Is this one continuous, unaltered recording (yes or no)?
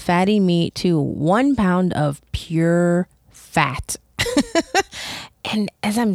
yes